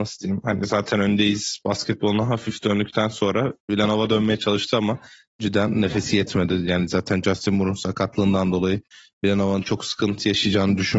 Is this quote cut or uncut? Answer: uncut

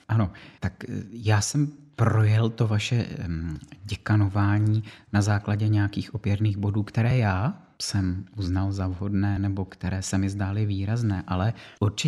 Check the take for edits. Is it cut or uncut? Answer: uncut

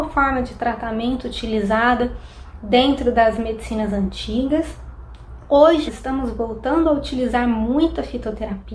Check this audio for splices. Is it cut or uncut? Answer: cut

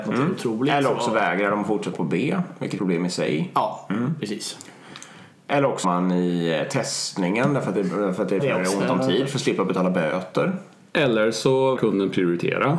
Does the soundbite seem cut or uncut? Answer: cut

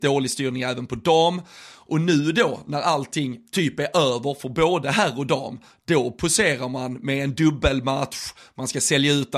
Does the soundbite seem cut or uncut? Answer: uncut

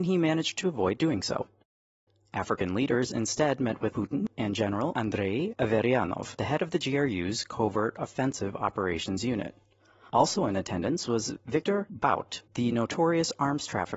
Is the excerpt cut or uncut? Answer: uncut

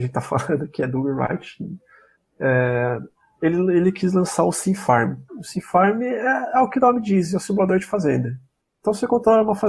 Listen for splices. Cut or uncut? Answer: cut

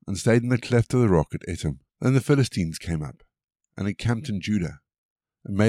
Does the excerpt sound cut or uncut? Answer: cut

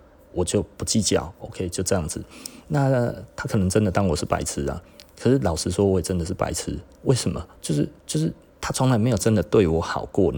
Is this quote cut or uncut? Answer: cut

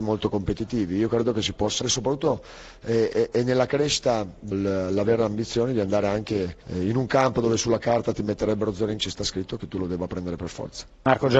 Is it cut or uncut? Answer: cut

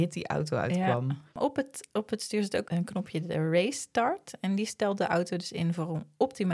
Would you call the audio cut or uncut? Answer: cut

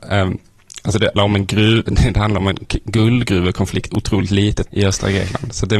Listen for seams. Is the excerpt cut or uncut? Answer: cut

